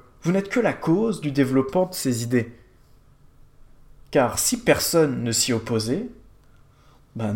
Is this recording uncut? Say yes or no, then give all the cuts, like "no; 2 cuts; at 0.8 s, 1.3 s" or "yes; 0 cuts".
yes; 0 cuts